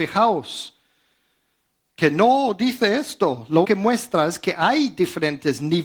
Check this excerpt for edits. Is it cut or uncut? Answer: cut